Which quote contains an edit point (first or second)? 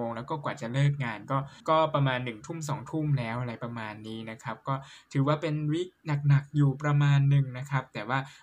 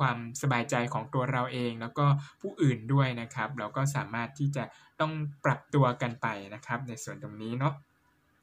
first